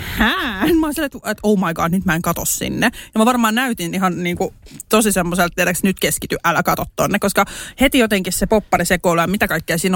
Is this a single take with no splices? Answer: yes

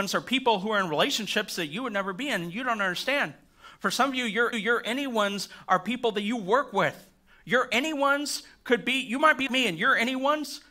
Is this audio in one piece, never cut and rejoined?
no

